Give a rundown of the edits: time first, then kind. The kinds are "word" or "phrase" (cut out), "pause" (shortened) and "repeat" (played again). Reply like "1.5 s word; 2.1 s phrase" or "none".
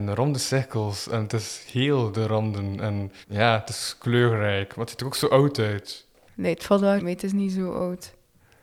3.2 s pause; 6.3 s pause; 7.0 s word